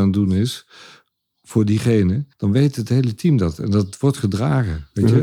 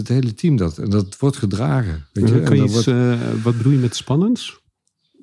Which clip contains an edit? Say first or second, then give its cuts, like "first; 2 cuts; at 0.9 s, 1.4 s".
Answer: first; 1 cut; at 2.3 s